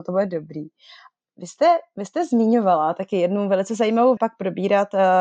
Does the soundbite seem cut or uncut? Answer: cut